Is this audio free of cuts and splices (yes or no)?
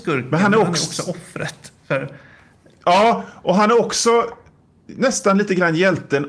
yes